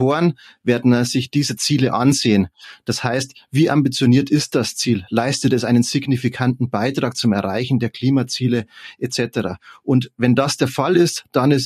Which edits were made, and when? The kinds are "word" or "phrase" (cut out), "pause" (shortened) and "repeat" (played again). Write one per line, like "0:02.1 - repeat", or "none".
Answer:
none

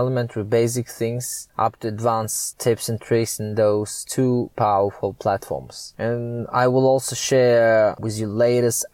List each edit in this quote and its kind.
none

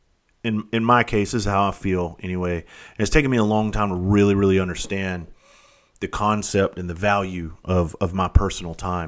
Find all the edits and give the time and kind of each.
none

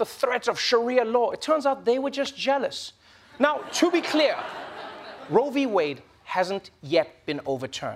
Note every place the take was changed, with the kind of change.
none

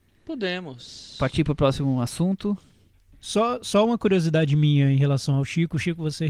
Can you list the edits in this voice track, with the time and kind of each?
none

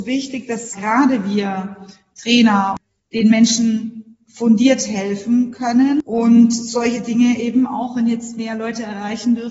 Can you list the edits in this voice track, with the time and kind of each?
none

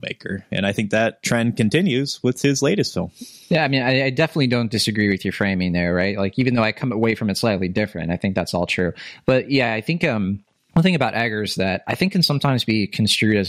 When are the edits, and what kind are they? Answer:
none

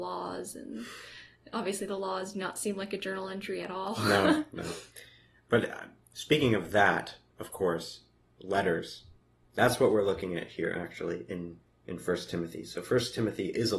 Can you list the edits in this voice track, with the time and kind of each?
none

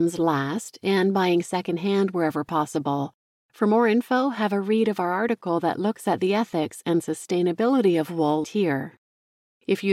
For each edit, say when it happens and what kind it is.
0:08.4 - word

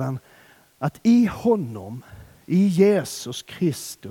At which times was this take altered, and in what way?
none

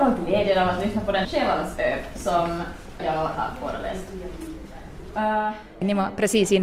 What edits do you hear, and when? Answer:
0:01.2 - phrase
0:03.0 - word
0:03.3 - word

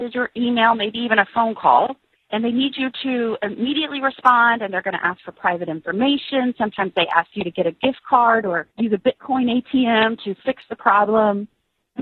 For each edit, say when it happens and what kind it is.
0:02.1 - pause
0:08.7 - pause

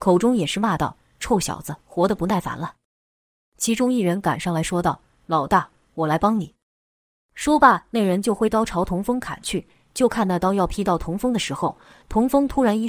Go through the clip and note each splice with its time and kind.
0:01.8 - pause

